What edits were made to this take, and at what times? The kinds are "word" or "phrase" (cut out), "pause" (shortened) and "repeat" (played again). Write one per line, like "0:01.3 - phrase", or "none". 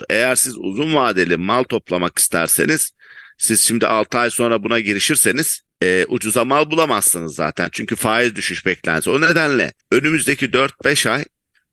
0:05.7 - pause
0:09.8 - pause